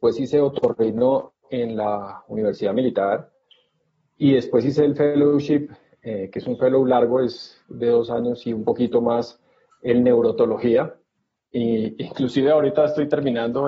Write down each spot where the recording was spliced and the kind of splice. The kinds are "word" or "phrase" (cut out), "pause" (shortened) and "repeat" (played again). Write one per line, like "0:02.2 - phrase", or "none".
0:07.6 - pause